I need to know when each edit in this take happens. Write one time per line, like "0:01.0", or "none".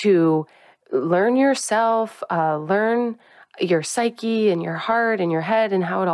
none